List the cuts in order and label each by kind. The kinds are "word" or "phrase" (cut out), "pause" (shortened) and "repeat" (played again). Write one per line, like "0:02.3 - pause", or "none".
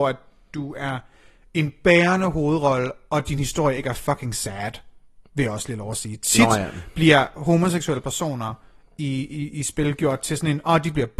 none